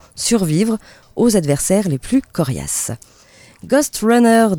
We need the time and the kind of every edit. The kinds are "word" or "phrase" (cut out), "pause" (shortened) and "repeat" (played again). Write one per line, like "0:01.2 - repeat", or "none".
none